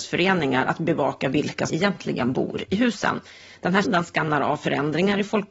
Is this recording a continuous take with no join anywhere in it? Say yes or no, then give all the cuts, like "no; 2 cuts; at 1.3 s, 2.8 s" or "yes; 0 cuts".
no; 2 cuts; at 1.7 s, 3.8 s